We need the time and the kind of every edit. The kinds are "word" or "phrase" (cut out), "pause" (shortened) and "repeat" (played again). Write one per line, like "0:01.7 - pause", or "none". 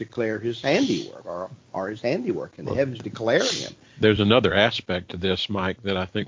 none